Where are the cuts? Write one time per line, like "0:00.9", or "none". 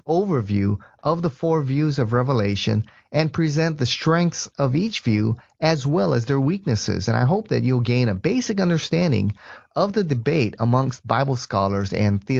none